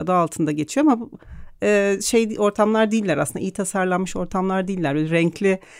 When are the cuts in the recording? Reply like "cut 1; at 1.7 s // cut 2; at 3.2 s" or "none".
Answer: none